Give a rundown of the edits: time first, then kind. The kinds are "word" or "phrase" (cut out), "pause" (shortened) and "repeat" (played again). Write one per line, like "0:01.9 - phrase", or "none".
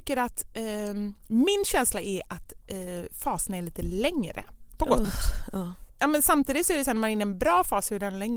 0:05.0 - word
0:05.9 - pause